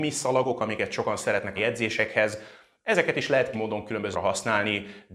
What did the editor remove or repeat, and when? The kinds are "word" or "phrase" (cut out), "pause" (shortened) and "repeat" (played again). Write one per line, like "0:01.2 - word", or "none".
0:01.6 - word
0:03.5 - word
0:04.1 - word

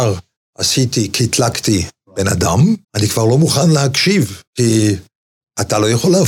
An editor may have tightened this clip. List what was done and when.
0:02.8 - pause
0:04.5 - pause

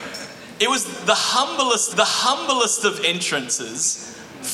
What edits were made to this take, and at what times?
0:01.9 - repeat

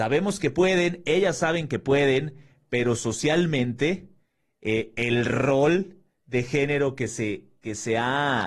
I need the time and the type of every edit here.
none

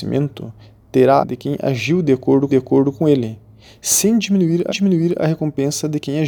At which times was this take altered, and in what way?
0:01.2 - phrase
0:02.5 - repeat
0:04.7 - repeat

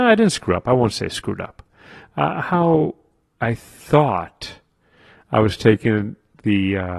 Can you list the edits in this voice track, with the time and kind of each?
none

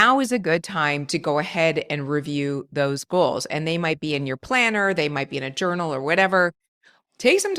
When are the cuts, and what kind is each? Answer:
none

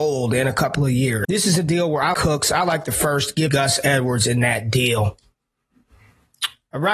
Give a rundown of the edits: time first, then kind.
0:01.2 - word
0:02.1 - word
0:03.5 - word

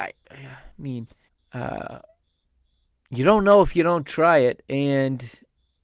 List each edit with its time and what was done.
0:01.3 - pause

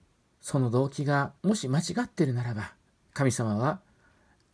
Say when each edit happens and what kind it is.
0:01.4 - pause
0:02.8 - pause

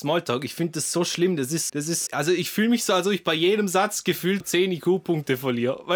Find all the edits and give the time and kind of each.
0:01.7 - word
0:02.1 - word
0:04.4 - word

